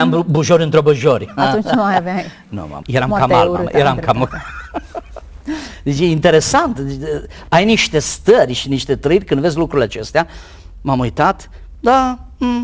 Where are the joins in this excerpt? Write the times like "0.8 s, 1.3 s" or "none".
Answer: 2.8 s